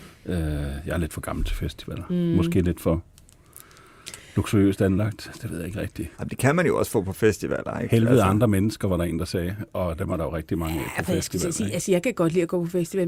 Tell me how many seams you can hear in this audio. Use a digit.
1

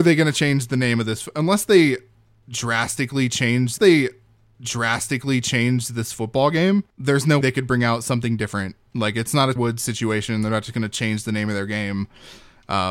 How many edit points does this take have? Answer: 4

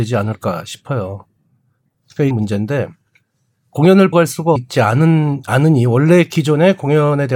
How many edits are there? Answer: 3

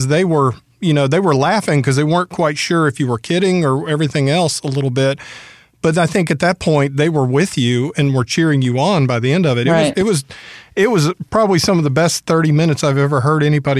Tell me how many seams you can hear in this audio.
0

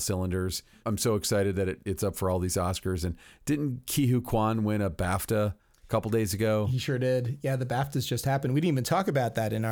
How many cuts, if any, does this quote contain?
0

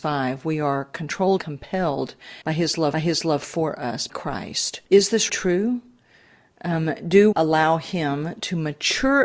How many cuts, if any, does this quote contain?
7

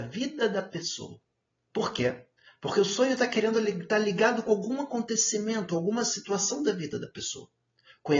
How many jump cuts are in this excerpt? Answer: 0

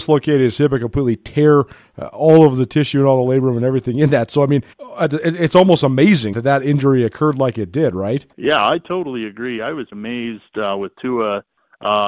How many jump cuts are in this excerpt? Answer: 4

